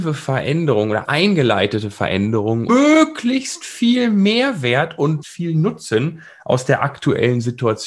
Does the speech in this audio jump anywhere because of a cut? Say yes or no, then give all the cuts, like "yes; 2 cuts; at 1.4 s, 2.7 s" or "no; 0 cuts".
yes; 3 cuts; at 1.0 s, 2.7 s, 5.2 s